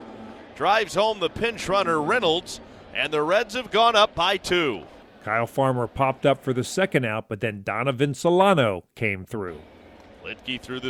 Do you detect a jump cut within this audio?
no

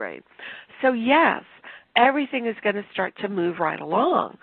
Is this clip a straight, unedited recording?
yes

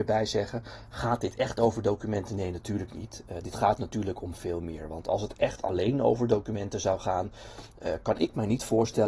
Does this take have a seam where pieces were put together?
no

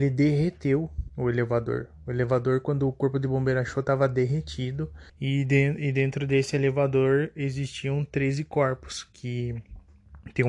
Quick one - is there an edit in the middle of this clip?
yes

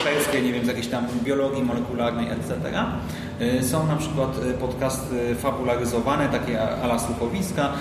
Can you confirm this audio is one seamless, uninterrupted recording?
yes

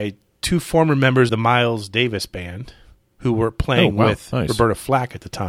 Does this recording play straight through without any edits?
no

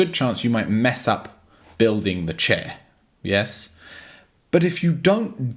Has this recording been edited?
no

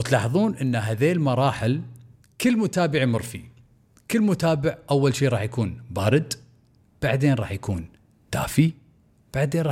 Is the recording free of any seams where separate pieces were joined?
yes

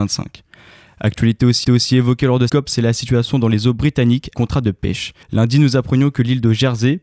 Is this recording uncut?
no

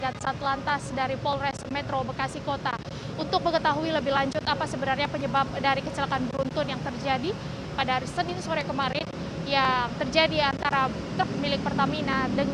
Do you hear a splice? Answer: no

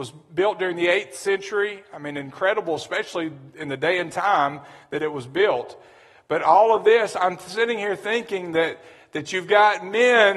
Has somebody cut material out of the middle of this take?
no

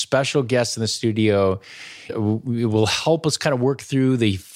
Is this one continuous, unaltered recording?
no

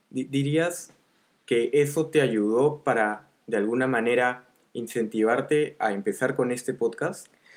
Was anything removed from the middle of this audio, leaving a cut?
no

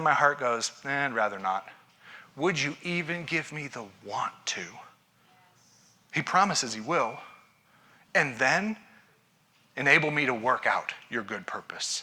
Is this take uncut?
yes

